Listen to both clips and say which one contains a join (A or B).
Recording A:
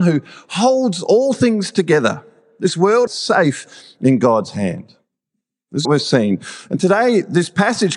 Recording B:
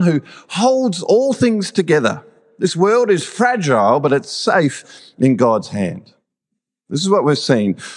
A